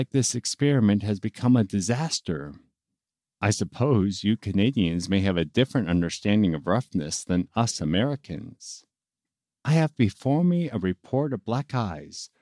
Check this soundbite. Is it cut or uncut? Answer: uncut